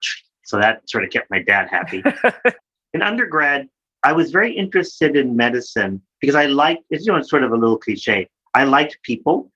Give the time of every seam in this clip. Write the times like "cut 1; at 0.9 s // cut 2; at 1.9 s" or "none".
none